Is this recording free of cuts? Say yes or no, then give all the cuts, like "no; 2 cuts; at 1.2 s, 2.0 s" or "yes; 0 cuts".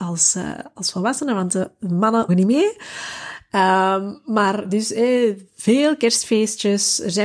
no; 2 cuts; at 2.3 s, 4.6 s